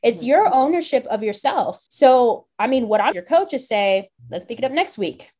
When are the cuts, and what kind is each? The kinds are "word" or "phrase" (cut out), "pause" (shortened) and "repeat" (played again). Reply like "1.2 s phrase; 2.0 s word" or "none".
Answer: 1.9 s pause; 3.1 s phrase; 4.2 s pause